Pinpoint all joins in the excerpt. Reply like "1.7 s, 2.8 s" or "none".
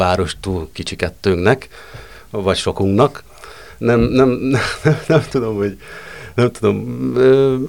none